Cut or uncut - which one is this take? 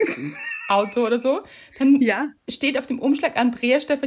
cut